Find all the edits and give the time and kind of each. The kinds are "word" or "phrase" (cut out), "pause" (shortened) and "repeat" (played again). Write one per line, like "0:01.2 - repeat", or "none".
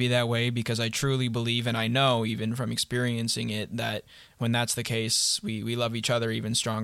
none